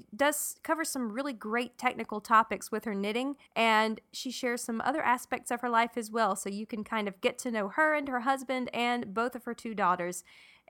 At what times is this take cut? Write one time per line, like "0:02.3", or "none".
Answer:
0:03.5